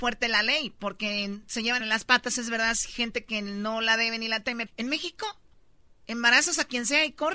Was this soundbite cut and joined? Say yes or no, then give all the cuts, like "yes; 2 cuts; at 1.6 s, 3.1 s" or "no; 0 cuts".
yes; 3 cuts; at 1.4 s, 1.8 s, 4.7 s